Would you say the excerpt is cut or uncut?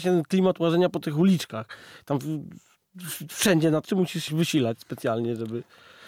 cut